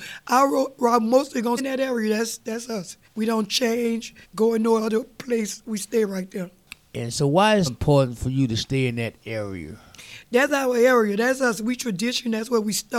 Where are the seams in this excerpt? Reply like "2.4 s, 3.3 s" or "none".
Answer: 1.6 s, 3.0 s, 4.2 s, 7.7 s